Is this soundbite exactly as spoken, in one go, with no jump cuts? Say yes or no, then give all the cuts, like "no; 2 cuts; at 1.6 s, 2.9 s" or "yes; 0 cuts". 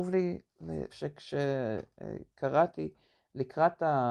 no; 1 cut; at 0.9 s